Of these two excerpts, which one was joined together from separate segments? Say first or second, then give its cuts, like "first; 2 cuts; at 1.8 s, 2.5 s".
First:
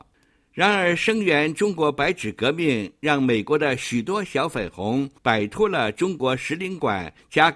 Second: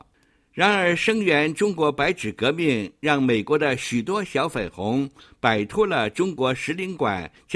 first; 1 cut; at 5.2 s